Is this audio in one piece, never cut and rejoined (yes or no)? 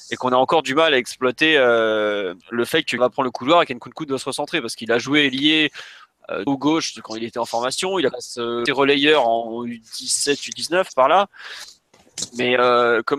no